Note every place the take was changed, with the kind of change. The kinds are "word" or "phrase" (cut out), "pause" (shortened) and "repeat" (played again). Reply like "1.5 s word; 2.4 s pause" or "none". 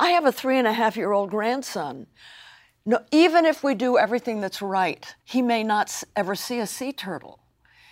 5.2 s pause